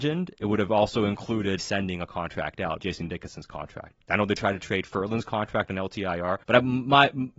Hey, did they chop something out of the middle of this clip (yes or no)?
yes